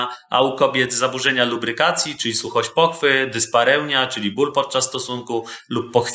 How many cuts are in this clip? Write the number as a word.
zero